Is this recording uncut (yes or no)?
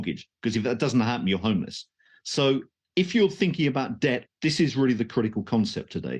no